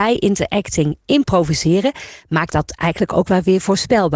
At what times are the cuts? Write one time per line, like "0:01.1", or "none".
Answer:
0:02.5